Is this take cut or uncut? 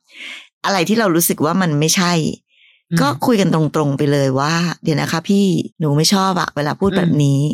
cut